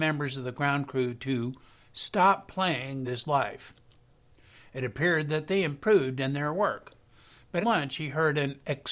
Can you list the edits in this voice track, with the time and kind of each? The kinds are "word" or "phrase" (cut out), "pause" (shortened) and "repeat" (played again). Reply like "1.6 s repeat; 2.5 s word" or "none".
3.0 s word; 7.6 s word